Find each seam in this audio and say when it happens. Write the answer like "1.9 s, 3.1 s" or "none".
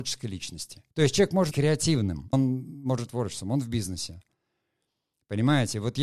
0.9 s, 1.5 s, 2.3 s, 3.1 s